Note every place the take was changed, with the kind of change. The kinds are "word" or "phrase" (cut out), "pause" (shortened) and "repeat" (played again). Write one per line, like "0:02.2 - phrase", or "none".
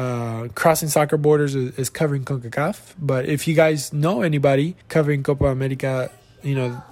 0:04.8 - pause